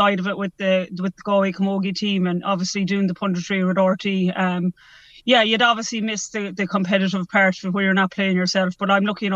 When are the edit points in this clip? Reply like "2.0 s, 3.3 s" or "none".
6.5 s